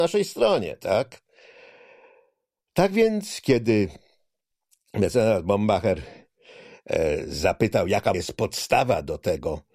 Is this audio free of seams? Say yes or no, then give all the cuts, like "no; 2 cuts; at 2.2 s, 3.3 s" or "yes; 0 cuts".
no; 1 cut; at 8.1 s